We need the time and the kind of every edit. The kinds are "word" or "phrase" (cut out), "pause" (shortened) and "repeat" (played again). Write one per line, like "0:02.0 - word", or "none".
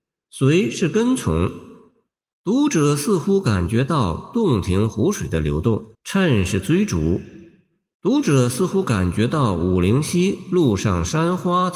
0:05.9 - pause